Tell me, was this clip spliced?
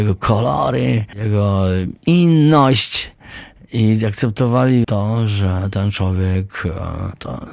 yes; 1 cut; at 4.8 s

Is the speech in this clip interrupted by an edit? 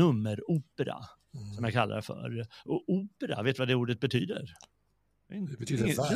no; 0 cuts

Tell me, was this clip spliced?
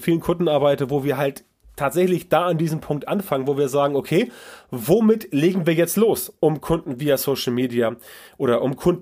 no; 0 cuts

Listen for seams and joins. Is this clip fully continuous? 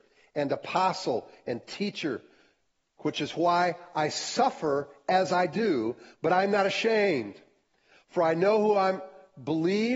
yes; 0 cuts

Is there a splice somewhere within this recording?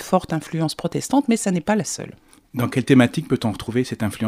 no; 0 cuts

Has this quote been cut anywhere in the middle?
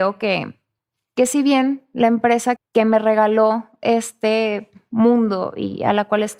yes; 1 cut; at 2.6 s

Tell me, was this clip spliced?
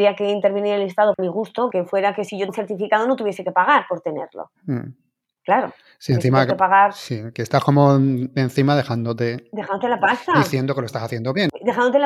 yes; 3 cuts; at 1.2 s, 1.7 s, 2.5 s

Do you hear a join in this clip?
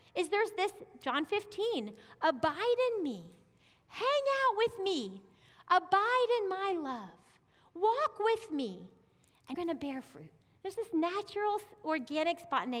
yes; 2 cuts; at 9.5 s, 10.4 s

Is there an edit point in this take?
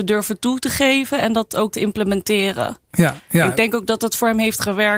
yes; 1 cut; at 1.7 s

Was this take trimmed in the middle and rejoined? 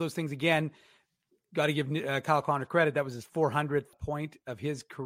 yes; 1 cut; at 3.9 s

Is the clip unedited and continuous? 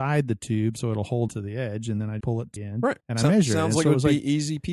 no; 4 cuts; at 1.3 s, 2.2 s, 2.6 s, 3.0 s

